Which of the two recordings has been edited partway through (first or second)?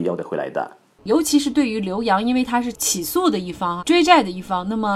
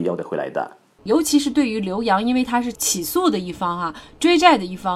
first